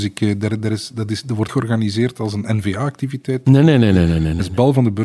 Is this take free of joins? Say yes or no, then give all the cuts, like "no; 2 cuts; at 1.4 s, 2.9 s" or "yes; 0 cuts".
no; 1 cut; at 1.5 s